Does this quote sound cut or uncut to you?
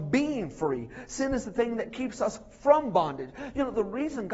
uncut